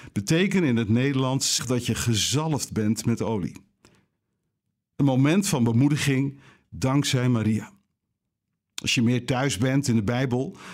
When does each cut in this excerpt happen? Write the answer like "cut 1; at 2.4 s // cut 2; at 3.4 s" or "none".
cut 1; at 1.6 s